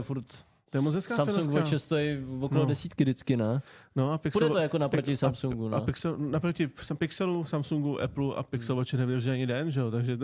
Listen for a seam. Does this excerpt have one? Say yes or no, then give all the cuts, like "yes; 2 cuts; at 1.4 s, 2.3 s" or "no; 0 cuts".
no; 0 cuts